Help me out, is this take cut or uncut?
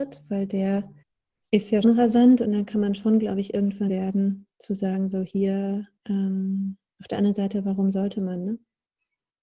cut